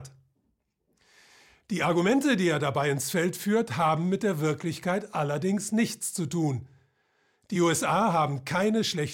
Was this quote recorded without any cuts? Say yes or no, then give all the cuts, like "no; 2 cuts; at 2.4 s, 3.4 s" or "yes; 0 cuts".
yes; 0 cuts